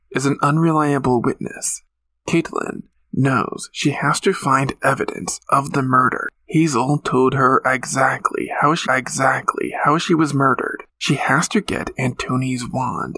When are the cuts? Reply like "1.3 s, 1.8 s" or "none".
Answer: 1.9 s, 8.9 s, 10.9 s